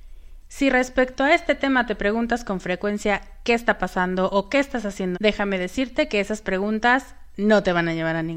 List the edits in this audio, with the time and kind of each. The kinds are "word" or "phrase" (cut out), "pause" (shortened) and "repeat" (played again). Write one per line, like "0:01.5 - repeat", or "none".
0:05.1 - word